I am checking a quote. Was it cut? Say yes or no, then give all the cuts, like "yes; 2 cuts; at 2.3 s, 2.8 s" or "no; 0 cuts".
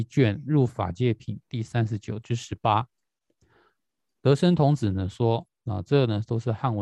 no; 0 cuts